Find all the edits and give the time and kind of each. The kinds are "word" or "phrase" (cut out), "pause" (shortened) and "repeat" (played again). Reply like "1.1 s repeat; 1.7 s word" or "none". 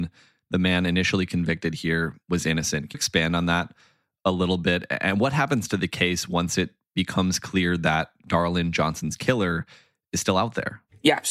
2.9 s word